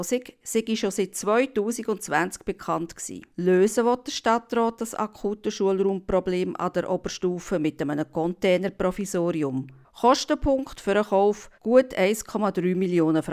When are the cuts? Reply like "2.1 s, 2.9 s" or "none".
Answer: 3.3 s, 11.5 s